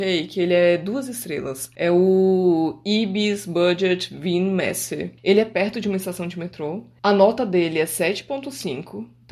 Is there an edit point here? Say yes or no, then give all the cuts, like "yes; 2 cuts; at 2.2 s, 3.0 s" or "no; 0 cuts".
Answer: no; 0 cuts